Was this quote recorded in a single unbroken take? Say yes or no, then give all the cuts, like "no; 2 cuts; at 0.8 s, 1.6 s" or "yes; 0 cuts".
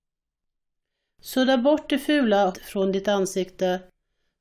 no; 1 cut; at 2.5 s